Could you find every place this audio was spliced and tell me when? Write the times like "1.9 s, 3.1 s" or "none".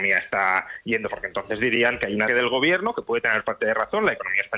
1.1 s, 2.3 s